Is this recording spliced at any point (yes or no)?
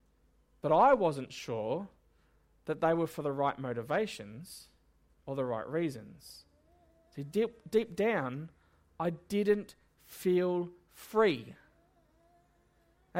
no